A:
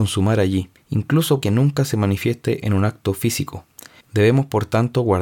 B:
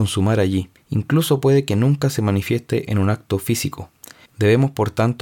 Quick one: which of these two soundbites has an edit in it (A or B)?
A